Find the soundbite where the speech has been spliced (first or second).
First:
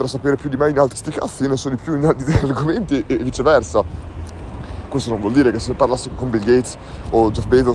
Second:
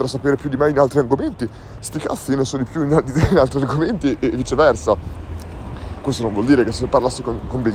first